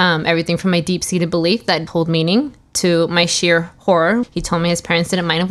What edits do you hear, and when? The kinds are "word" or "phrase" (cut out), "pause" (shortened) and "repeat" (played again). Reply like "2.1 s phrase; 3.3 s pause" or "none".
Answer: 1.9 s word; 4.2 s word